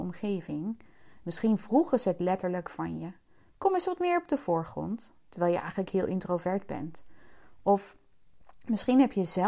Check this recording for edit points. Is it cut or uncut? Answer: uncut